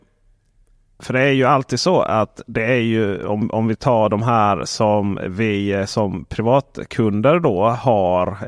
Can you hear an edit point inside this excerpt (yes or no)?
no